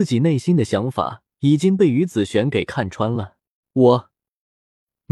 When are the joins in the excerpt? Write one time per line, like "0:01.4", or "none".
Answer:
0:01.3
0:03.6